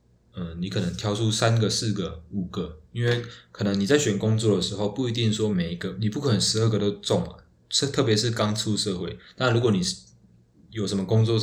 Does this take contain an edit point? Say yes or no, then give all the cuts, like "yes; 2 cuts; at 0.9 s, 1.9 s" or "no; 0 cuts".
no; 0 cuts